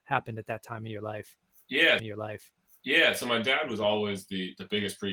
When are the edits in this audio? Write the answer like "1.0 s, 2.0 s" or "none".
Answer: 2.0 s